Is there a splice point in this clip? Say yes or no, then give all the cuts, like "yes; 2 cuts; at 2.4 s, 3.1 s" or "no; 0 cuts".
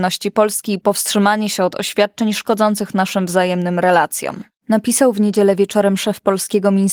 no; 0 cuts